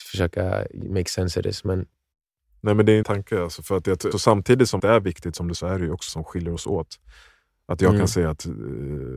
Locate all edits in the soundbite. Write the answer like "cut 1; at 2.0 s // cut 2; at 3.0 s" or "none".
cut 1; at 3.0 s // cut 2; at 4.1 s // cut 3; at 4.8 s // cut 4; at 5.5 s // cut 5; at 6.1 s